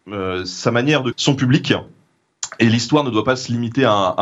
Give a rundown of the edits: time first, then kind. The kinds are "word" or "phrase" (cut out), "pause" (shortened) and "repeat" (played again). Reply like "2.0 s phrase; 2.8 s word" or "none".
1.1 s word